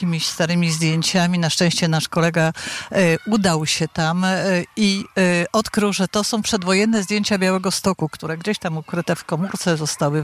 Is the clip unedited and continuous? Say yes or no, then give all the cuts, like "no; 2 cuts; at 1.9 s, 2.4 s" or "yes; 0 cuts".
yes; 0 cuts